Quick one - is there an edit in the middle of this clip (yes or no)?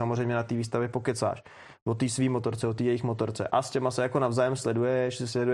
no